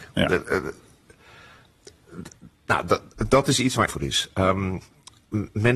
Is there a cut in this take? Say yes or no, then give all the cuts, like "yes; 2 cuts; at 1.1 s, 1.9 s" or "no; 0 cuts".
yes; 2 cuts; at 2.5 s, 3.9 s